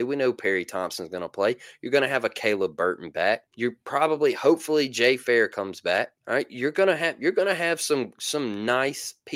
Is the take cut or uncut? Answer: cut